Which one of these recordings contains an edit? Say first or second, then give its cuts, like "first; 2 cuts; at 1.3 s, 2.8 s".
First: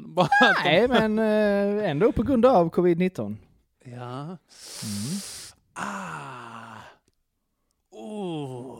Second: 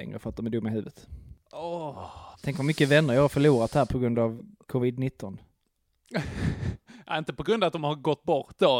second; 1 cut; at 2.3 s